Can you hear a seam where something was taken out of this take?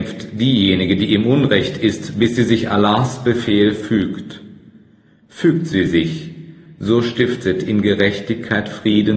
no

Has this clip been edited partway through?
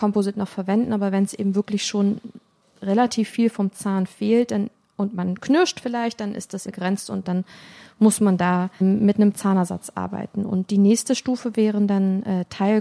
yes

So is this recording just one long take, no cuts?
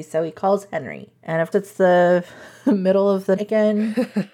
no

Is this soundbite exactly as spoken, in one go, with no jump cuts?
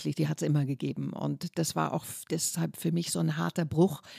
yes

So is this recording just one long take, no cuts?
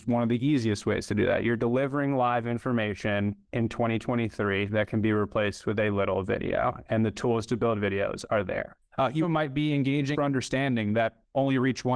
no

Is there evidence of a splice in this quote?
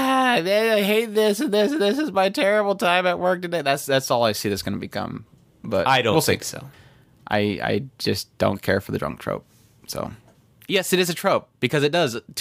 no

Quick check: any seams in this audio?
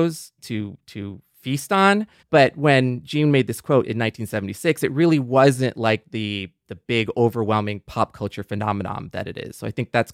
yes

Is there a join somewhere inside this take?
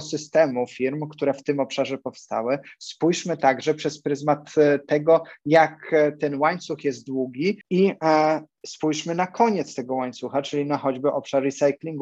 yes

